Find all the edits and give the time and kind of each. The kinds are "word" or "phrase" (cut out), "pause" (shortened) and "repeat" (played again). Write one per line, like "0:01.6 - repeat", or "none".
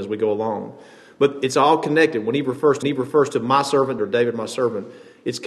0:02.8 - repeat
0:04.0 - word